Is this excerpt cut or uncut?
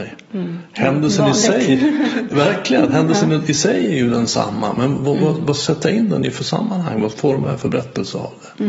uncut